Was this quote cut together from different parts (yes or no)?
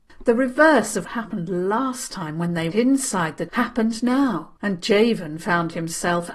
yes